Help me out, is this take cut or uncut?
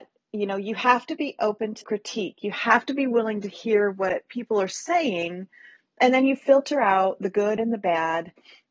cut